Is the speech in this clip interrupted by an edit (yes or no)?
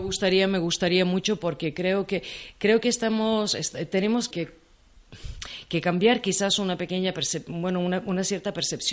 yes